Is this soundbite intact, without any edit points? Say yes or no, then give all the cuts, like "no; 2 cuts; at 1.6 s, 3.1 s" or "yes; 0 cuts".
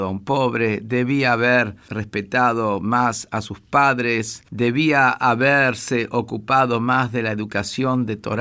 yes; 0 cuts